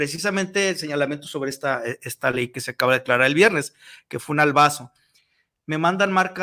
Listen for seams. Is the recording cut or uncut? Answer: uncut